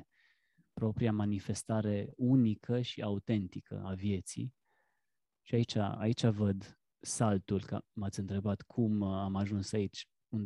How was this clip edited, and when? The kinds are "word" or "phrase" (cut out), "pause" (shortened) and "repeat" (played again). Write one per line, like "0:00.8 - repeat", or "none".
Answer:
none